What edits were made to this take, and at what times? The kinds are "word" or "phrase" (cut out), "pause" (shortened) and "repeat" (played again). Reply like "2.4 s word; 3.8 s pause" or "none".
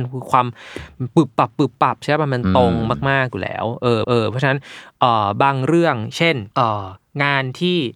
4.0 s repeat; 6.5 s pause